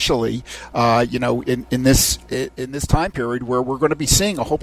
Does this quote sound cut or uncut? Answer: uncut